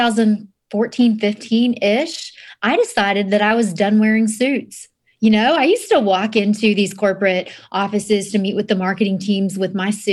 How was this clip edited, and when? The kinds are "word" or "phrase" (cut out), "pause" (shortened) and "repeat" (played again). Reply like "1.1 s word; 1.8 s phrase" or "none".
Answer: none